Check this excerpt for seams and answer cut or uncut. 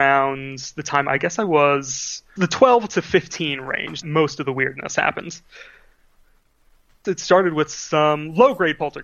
cut